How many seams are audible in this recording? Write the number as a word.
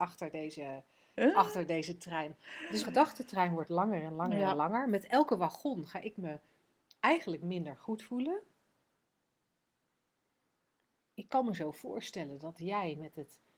one